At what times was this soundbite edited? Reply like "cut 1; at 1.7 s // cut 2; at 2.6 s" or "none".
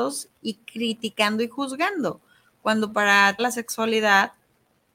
cut 1; at 3.4 s